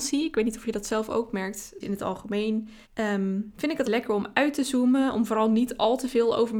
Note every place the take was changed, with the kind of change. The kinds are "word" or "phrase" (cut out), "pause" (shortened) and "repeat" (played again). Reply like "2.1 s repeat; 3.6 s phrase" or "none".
1.8 s phrase; 2.8 s pause; 3.8 s word